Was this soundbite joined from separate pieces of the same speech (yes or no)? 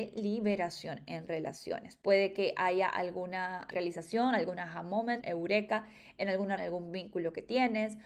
yes